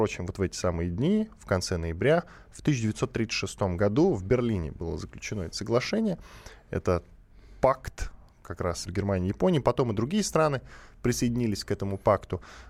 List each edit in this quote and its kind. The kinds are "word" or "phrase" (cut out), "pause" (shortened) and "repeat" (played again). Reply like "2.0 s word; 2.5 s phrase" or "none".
8.9 s word